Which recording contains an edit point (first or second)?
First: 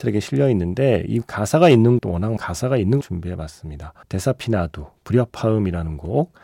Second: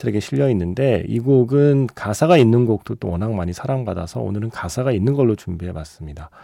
first